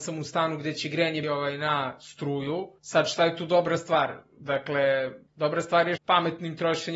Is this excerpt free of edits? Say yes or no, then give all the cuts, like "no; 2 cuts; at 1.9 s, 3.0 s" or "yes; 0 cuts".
no; 4 cuts; at 1.2 s, 2.8 s, 5.3 s, 6.0 s